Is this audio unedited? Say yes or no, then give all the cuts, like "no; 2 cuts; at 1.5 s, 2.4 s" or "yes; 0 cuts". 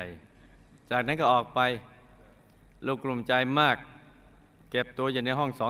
yes; 0 cuts